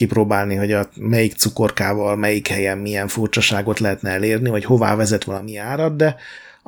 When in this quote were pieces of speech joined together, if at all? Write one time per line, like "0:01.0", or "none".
none